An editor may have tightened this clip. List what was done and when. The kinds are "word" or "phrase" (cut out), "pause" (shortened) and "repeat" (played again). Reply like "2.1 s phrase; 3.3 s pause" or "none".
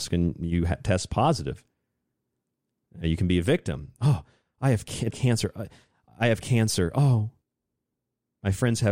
5.1 s word